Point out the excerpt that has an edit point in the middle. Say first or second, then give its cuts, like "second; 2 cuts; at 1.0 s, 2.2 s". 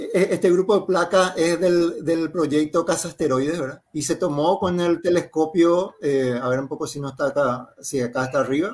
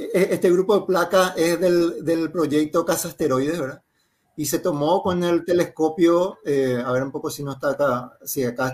first; 1 cut; at 3.9 s